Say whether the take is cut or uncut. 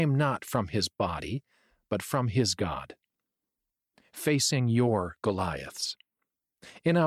uncut